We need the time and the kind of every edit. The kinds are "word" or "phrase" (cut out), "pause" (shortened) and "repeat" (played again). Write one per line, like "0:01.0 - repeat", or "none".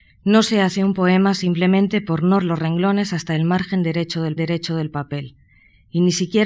0:02.4 - word
0:04.4 - repeat